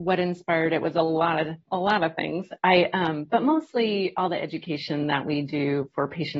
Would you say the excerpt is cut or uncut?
uncut